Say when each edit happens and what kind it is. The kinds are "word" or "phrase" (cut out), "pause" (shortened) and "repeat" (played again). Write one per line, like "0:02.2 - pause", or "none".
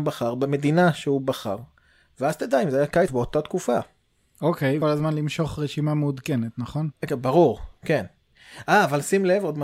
0:03.1 - word
0:04.8 - phrase
0:07.0 - pause